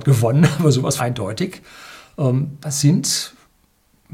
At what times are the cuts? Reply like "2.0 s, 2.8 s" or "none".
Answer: 1.0 s, 2.6 s